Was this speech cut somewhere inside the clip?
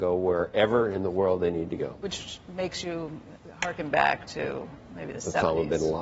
no; 0 cuts

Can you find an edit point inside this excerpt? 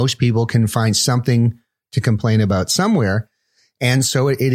no; 0 cuts

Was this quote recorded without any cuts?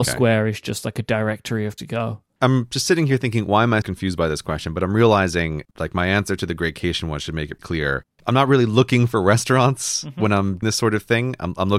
no; 5 cuts; at 1.8 s, 3.8 s, 5.7 s, 7.6 s, 10.6 s

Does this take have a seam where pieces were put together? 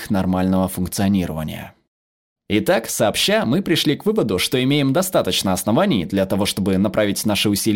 no; 0 cuts

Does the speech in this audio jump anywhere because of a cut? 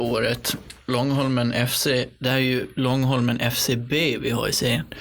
no; 0 cuts

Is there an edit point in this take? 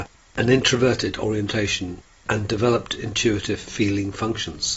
no; 0 cuts

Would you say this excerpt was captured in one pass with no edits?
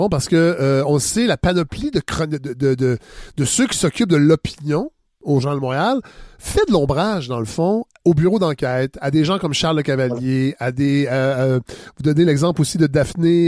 yes; 0 cuts

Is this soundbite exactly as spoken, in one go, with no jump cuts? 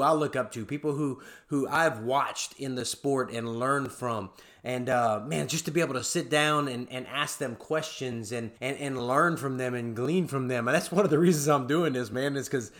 no; 1 cut; at 8.6 s

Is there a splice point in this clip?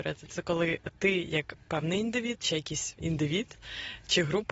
no; 0 cuts

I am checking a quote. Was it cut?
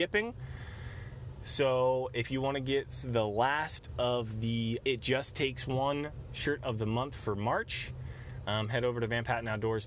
yes; 1 cut; at 4.8 s

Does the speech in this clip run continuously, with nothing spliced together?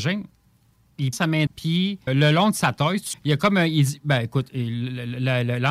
no; 4 cuts; at 1.1 s, 1.5 s, 2.1 s, 3.1 s

